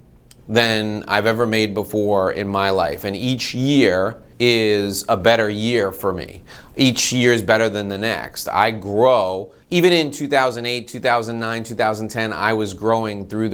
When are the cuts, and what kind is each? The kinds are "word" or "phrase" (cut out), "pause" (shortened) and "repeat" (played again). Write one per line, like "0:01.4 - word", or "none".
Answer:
0:04.3 - pause
0:09.6 - pause

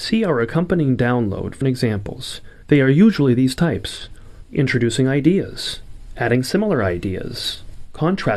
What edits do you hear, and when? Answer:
0:01.6 - word

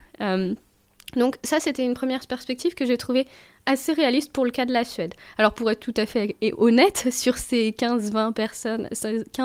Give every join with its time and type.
none

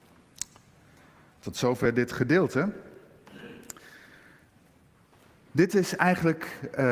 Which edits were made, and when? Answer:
none

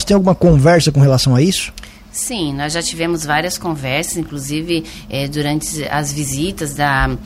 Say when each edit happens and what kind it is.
none

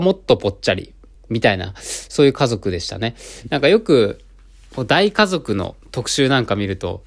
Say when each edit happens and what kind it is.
0:01.1 - pause
0:05.8 - pause

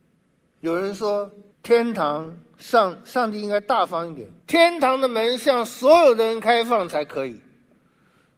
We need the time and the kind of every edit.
0:01.5 - pause
0:04.4 - pause

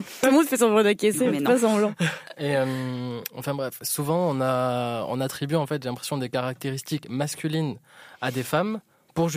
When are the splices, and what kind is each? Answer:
none

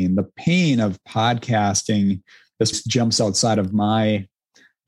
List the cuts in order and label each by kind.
0:02.7 - word

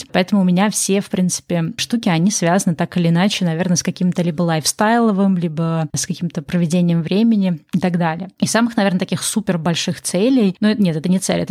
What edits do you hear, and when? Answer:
none

